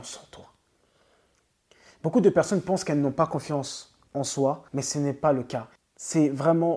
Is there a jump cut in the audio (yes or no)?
yes